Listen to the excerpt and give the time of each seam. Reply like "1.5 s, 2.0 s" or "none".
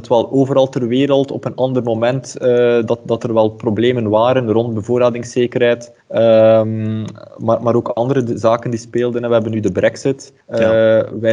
6.0 s, 10.4 s